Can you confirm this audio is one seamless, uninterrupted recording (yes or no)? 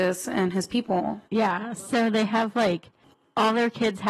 no